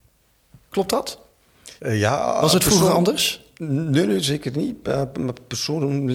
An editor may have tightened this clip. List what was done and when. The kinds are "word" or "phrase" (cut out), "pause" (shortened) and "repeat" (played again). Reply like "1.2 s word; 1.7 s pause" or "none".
1.8 s pause